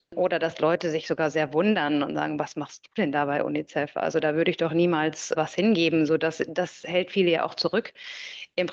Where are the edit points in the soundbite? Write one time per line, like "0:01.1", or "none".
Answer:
0:05.3

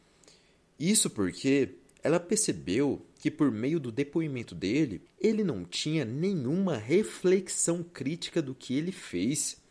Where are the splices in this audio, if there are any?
0:05.1

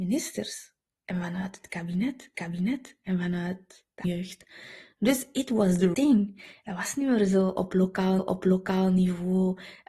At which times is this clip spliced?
0:02.3
0:04.0
0:05.9
0:08.2

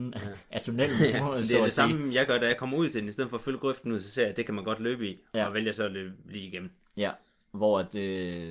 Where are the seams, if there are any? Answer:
none

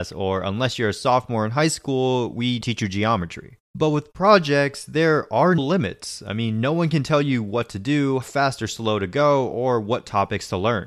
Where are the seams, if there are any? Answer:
0:02.6
0:03.6
0:05.6
0:08.2

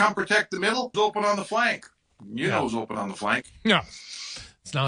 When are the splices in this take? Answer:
0:00.9

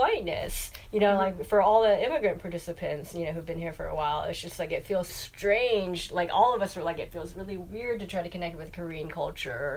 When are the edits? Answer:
0:05.1

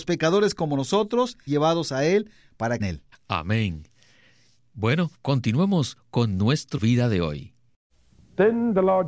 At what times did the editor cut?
0:01.5
0:02.8
0:03.1
0:05.1
0:06.8

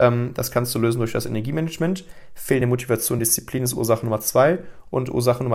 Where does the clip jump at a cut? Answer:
none

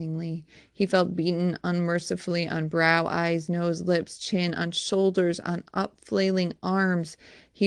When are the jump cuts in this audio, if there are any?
none

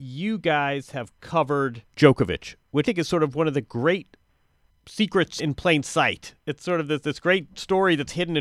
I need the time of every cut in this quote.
0:01.9
0:02.8
0:05.4
0:06.4

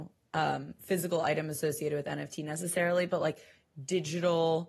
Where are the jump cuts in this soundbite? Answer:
none

